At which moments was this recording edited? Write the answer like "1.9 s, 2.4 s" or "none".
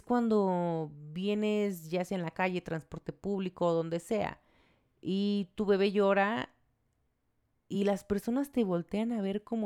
none